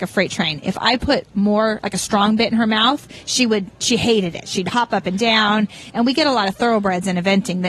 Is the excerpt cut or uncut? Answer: uncut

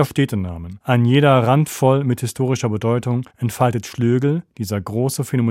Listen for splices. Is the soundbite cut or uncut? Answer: cut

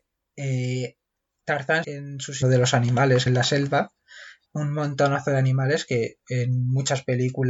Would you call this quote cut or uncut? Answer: cut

